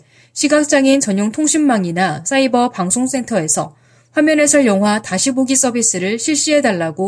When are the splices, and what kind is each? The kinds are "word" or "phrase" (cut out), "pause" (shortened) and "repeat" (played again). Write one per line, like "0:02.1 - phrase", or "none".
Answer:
none